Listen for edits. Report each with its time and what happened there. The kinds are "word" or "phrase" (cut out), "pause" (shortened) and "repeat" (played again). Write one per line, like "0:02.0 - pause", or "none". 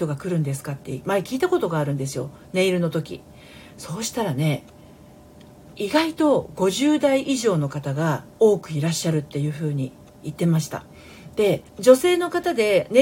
0:08.3 - pause
0:11.7 - pause